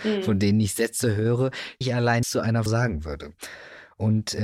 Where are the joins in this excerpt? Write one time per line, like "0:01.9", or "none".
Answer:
0:01.8
0:02.2
0:02.7